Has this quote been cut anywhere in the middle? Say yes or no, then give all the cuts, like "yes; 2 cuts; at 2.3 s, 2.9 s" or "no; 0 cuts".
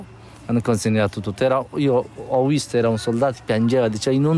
no; 0 cuts